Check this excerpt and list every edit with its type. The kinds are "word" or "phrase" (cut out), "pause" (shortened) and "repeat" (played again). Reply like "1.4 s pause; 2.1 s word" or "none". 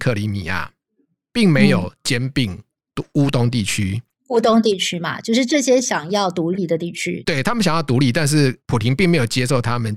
none